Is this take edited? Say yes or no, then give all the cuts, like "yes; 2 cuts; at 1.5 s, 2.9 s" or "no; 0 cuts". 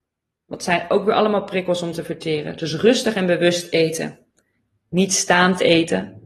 no; 0 cuts